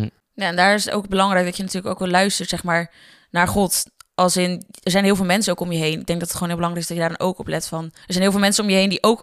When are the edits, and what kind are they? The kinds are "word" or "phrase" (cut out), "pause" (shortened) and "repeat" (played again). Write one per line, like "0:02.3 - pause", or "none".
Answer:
0:08.0 - pause